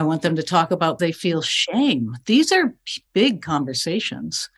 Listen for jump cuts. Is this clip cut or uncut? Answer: cut